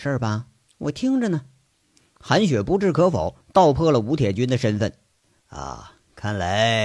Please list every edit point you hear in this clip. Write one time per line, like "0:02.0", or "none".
none